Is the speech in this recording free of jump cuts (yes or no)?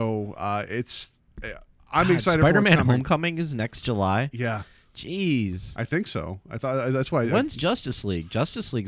yes